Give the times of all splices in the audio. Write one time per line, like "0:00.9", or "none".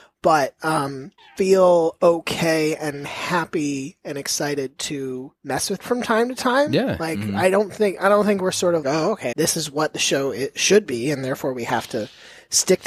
0:01.2
0:05.4
0:05.8
0:08.8
0:09.3